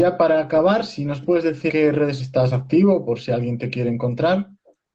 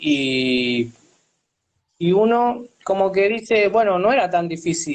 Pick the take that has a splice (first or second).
first